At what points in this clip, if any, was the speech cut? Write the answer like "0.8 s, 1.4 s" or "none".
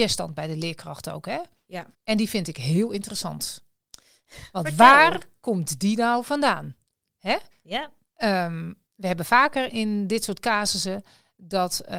1.9 s, 8.9 s, 9.7 s